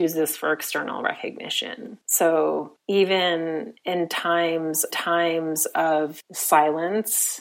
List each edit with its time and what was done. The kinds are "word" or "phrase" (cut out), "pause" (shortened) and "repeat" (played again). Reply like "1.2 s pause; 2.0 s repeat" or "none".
4.9 s repeat